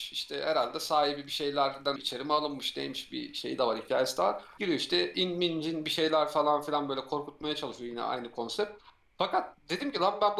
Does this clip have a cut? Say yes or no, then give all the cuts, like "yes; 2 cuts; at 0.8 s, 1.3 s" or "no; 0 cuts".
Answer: yes; 2 cuts; at 2.0 s, 4.6 s